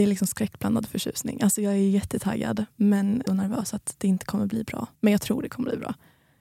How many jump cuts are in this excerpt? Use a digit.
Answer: 2